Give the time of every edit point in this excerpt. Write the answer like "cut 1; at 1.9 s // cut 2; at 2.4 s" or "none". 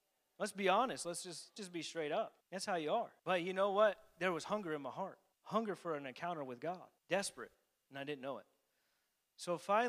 cut 1; at 1.6 s // cut 2; at 2.4 s // cut 3; at 3.2 s // cut 4; at 5.3 s // cut 5; at 7.0 s